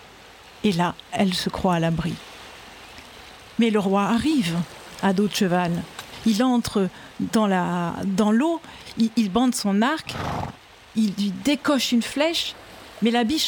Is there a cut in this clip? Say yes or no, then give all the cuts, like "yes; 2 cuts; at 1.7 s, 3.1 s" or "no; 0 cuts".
no; 0 cuts